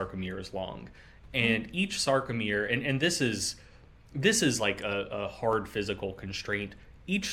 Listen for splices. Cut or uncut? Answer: uncut